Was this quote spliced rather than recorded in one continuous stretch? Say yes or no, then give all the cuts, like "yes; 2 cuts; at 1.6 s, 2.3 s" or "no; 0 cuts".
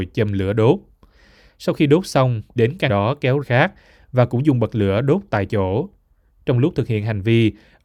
yes; 3 cuts; at 2.6 s, 2.9 s, 3.4 s